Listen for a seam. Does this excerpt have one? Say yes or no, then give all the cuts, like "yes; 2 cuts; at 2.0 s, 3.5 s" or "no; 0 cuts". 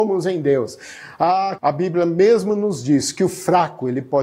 yes; 1 cut; at 1.6 s